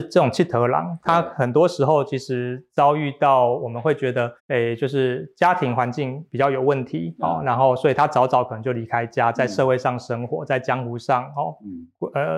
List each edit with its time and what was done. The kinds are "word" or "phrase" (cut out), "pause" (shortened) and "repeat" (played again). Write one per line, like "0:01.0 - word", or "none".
0:04.4 - pause